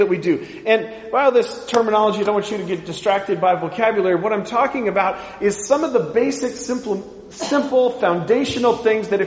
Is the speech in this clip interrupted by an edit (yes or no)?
no